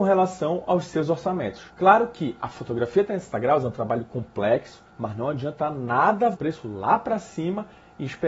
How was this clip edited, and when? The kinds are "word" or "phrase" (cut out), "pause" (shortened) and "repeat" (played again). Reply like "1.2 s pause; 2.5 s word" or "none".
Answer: 1.7 s pause; 4.9 s pause; 6.3 s phrase